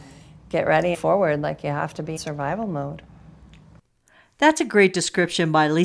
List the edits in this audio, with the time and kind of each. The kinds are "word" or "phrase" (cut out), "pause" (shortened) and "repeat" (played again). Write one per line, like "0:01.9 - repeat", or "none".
0:00.9 - phrase
0:02.2 - word